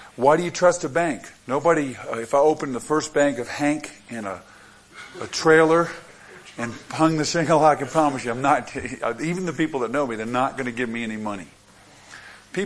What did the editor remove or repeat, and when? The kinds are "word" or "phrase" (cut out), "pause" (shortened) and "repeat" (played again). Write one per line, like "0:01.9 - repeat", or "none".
0:01.4 - pause